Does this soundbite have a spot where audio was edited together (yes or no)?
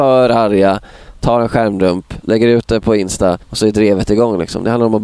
yes